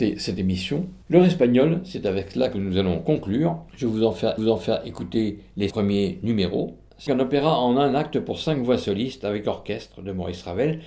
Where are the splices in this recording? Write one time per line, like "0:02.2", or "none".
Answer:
0:01.0
0:03.7
0:04.4
0:07.1